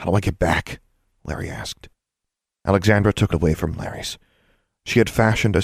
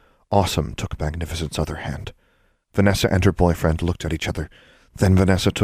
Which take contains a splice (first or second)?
first